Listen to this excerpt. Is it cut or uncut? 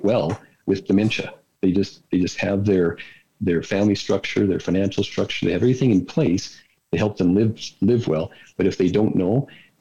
uncut